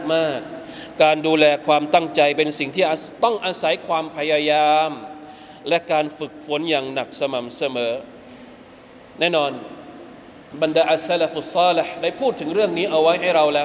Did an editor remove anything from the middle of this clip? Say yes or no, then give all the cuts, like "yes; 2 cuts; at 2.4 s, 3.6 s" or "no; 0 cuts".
no; 0 cuts